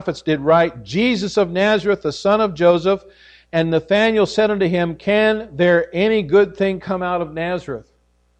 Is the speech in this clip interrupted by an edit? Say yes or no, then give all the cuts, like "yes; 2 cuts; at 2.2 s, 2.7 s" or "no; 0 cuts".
no; 0 cuts